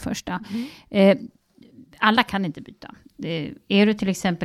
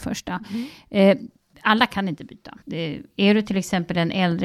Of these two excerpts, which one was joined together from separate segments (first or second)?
second